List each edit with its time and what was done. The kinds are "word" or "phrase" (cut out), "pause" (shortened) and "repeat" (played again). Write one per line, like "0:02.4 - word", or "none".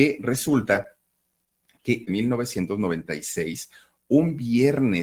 0:02.1 - phrase